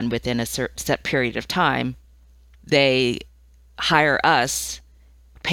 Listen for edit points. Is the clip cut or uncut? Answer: cut